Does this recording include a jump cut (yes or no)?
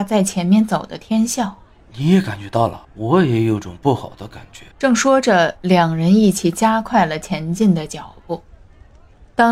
yes